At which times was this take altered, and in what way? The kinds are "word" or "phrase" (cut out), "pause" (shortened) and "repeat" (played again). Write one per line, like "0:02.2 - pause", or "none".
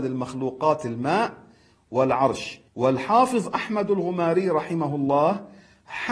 0:02.7 - pause